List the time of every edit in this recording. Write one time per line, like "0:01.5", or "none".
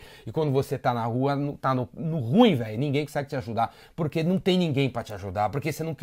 none